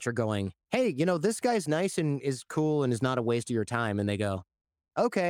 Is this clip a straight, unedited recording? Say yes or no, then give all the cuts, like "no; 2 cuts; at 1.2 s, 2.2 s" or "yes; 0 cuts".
yes; 0 cuts